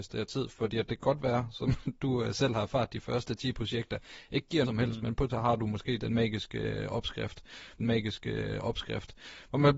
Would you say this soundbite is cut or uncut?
cut